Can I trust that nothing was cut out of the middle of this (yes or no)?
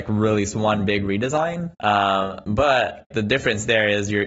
no